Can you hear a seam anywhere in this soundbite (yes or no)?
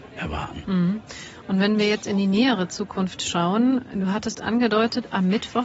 no